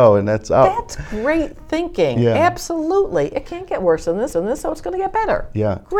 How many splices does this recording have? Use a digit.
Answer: 1